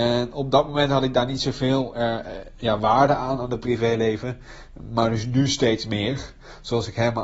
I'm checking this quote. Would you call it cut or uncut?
uncut